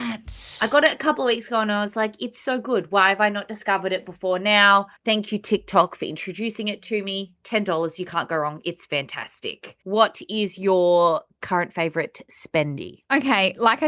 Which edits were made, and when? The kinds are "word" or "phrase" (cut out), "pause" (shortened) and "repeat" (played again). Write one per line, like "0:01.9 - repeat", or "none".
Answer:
0:05.0 - pause
0:09.8 - pause